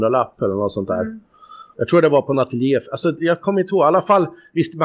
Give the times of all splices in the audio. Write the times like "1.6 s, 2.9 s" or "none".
none

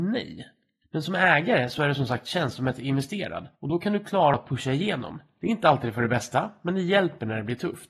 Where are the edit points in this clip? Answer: 3.5 s, 4.3 s

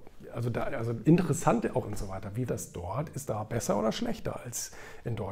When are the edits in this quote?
1.0 s, 1.8 s, 2.5 s, 3.3 s

